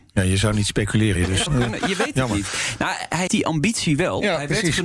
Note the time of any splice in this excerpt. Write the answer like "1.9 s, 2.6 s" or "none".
1.2 s, 1.5 s, 3.3 s